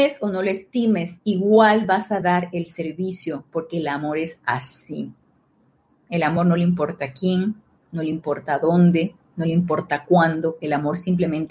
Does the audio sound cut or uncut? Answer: uncut